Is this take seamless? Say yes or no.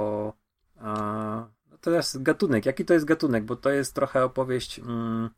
yes